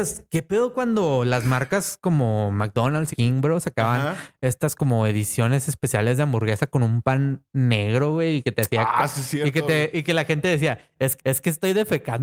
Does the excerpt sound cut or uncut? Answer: cut